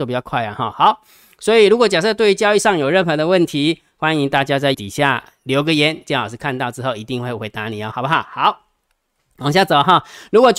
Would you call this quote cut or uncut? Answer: cut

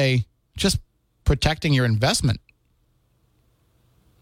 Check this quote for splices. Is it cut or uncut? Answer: uncut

